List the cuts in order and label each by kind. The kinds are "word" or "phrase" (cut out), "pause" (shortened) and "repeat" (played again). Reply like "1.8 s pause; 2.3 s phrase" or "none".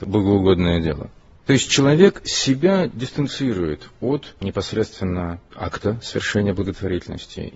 none